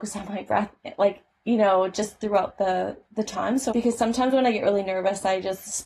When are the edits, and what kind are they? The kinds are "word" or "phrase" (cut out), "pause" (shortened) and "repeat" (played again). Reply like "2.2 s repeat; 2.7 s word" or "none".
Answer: 3.7 s word